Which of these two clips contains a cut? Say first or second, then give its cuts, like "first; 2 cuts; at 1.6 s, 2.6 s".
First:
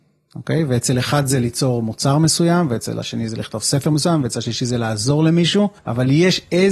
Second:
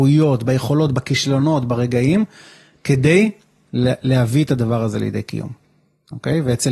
first; 1 cut; at 5.8 s